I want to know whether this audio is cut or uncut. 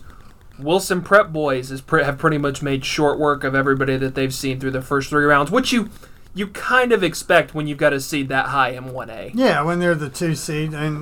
uncut